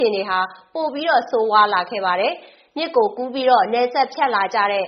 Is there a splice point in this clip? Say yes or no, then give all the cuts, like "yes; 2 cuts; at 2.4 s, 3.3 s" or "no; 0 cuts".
no; 0 cuts